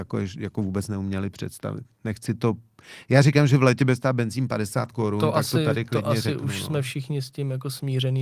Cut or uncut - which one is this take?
uncut